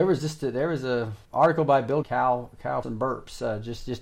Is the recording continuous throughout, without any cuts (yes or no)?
no